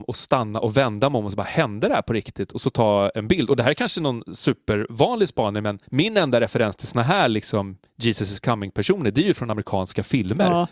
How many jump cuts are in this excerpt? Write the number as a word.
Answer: one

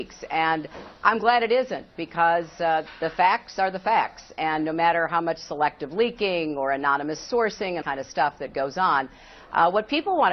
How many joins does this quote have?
one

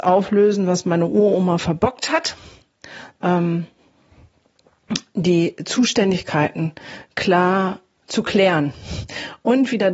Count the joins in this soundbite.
two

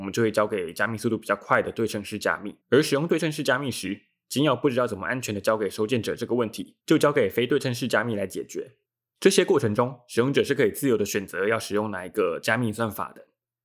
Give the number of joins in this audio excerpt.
three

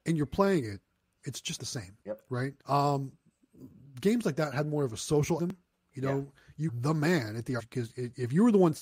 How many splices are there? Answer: six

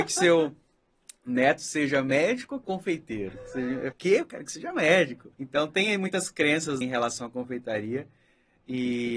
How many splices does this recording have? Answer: four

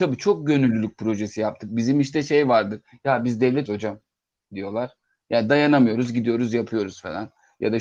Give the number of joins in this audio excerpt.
one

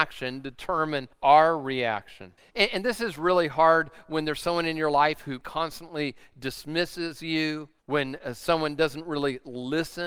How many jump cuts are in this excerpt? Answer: four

